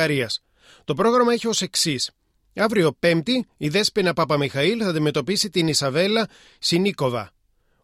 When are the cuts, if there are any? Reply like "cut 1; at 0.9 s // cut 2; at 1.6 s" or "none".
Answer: none

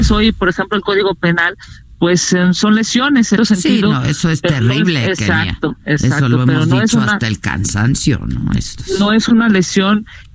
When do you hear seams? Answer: cut 1; at 3.4 s

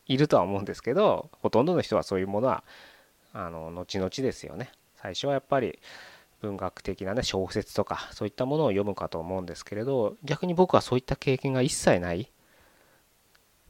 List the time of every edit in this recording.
none

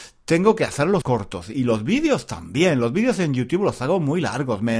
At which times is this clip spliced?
cut 1; at 1.0 s

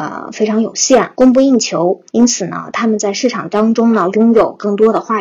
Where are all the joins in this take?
cut 1; at 1.1 s // cut 2; at 2.1 s

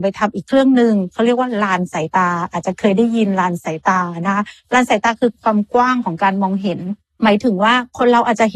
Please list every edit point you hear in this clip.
none

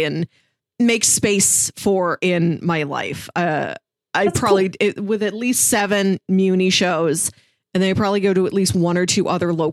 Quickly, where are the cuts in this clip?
none

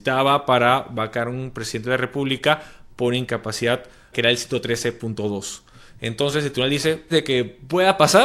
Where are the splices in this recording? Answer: cut 1; at 4.1 s // cut 2; at 7.1 s

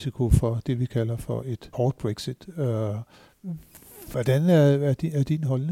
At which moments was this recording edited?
cut 1; at 1.7 s

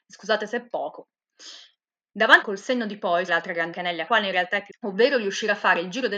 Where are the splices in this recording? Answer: cut 1; at 2.4 s // cut 2; at 3.3 s // cut 3; at 3.7 s // cut 4; at 4.1 s // cut 5; at 4.7 s

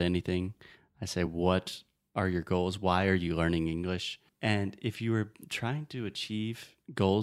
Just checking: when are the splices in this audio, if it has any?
none

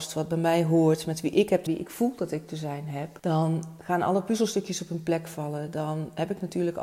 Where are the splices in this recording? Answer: cut 1; at 1.7 s

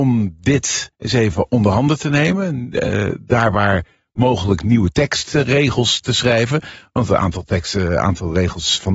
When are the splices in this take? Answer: cut 1; at 0.9 s

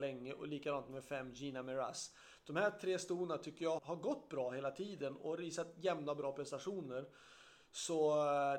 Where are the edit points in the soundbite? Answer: cut 1; at 3.8 s

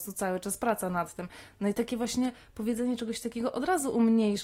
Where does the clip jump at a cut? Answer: none

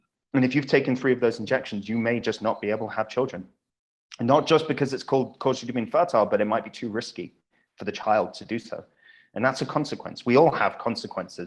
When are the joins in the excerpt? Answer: none

